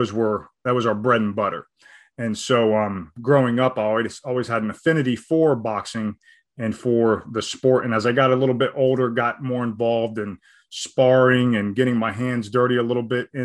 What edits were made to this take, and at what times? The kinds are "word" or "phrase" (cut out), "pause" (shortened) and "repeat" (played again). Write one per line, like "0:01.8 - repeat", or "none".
none